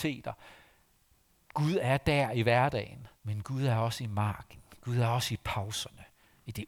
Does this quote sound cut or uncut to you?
cut